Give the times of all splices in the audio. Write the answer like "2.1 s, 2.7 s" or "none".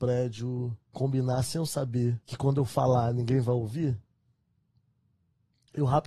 0.9 s, 2.2 s